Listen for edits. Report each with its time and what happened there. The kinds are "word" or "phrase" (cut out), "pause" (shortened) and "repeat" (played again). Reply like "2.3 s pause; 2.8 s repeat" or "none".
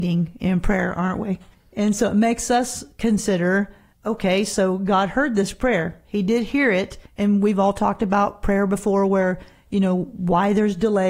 1.5 s pause; 3.9 s pause; 7.1 s pause